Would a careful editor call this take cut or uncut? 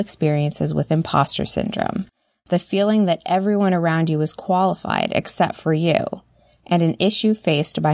uncut